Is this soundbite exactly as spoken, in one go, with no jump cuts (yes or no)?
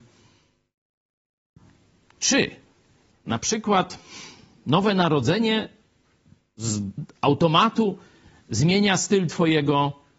yes